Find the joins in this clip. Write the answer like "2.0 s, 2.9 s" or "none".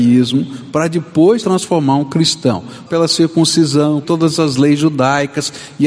1.4 s, 2.8 s, 4.0 s